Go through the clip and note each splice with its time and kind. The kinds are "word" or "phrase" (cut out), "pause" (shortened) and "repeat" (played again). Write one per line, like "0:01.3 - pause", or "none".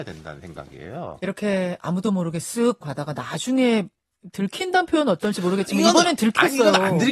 0:02.8 - phrase